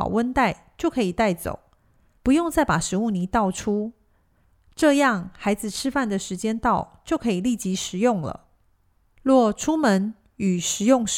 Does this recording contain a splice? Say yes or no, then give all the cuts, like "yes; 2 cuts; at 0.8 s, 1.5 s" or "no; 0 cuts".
no; 0 cuts